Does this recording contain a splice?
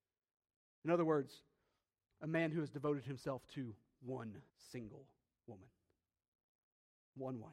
yes; 1 cut; at 4.5 s

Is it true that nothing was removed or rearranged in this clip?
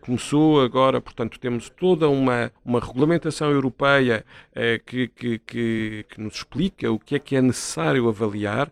no; 1 cut; at 2.6 s

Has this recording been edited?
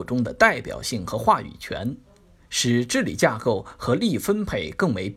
no; 0 cuts

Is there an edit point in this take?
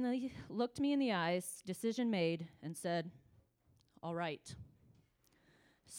no; 0 cuts

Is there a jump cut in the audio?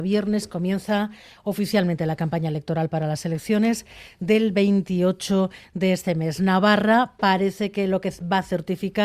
no; 0 cuts

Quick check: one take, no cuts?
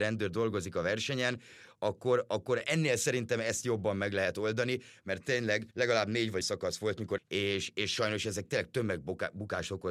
no; 4 cuts; at 2.6 s, 5.7 s, 6.4 s, 7.2 s

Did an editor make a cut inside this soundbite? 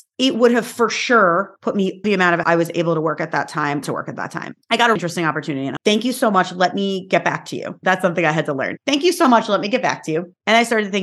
yes; 5 cuts; at 2.0 s, 2.4 s, 3.8 s, 5.0 s, 5.8 s

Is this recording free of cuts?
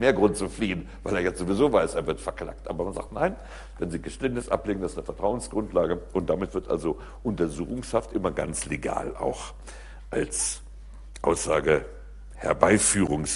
yes; 0 cuts

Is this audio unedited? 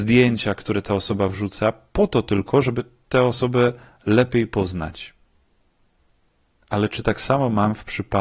yes; 0 cuts

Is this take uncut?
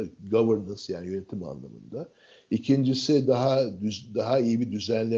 yes; 0 cuts

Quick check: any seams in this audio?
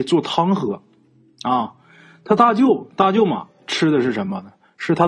no; 0 cuts

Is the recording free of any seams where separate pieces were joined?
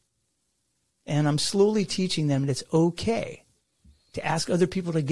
yes; 0 cuts

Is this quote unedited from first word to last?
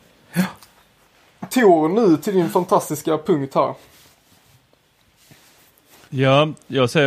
yes; 0 cuts

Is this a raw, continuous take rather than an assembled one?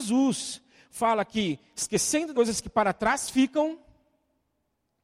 no; 1 cut; at 2.3 s

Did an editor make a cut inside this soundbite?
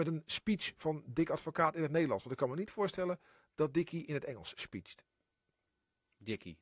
no; 0 cuts

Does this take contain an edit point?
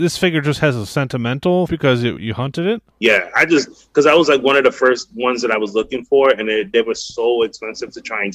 yes; 3 cuts; at 1.7 s, 2.2 s, 2.9 s

